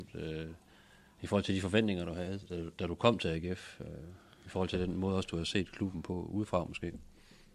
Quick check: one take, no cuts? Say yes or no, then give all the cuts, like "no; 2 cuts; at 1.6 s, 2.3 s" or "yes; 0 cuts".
yes; 0 cuts